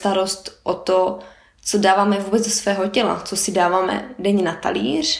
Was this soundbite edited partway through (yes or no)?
no